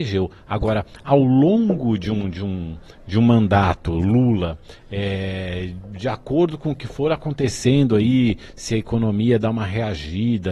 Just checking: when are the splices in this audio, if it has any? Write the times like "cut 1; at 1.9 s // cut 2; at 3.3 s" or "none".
none